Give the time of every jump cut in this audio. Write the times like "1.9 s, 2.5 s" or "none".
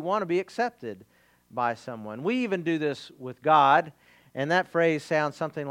none